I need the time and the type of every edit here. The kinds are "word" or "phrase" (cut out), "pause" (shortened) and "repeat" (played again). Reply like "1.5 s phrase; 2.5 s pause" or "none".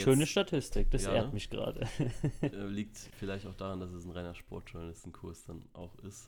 none

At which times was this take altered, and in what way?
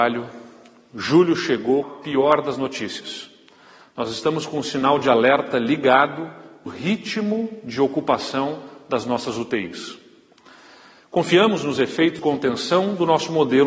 1.8 s phrase; 6.7 s word; 12.2 s word

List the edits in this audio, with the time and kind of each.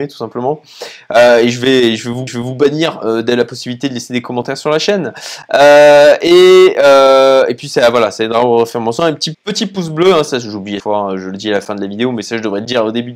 2.3 s repeat; 9.3 s word; 10.8 s word

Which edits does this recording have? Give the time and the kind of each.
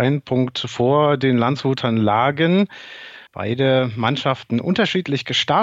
3.3 s pause

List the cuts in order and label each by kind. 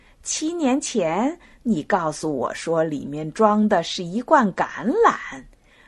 none

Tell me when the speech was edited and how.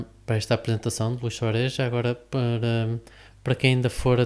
none

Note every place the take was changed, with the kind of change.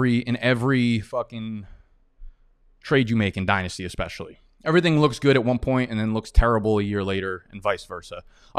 none

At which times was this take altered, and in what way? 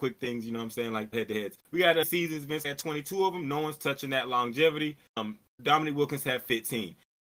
1.1 s word; 1.6 s pause; 2.0 s phrase; 2.6 s word

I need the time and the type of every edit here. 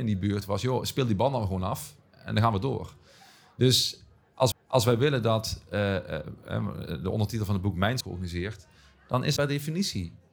4.5 s repeat; 8.0 s phrase; 9.4 s word

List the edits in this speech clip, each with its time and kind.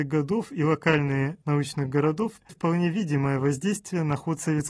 1.4 s word; 2.5 s word

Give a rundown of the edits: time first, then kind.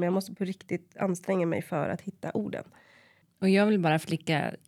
none

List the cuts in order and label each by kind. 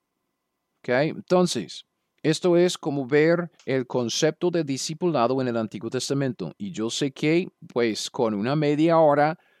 2.1 s pause; 3.5 s pause

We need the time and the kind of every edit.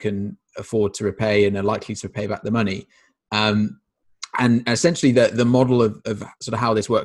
none

